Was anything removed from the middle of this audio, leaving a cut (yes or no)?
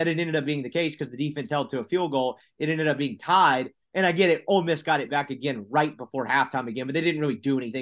no